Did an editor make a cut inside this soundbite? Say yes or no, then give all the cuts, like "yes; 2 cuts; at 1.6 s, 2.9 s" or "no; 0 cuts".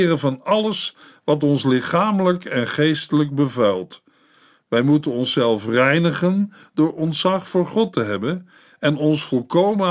no; 0 cuts